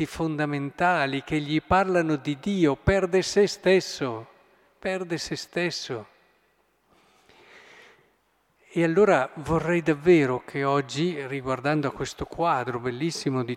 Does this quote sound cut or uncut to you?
uncut